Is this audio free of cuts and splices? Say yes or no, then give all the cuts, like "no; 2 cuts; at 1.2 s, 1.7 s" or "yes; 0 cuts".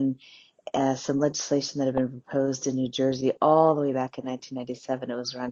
yes; 0 cuts